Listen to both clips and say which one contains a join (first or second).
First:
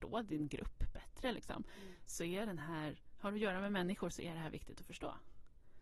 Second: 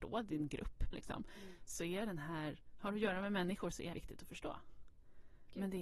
second